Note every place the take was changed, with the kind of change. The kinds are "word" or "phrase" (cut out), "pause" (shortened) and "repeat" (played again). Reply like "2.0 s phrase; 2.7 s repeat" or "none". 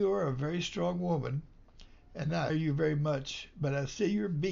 2.5 s word